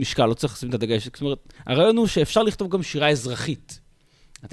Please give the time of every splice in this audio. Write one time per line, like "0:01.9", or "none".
0:01.6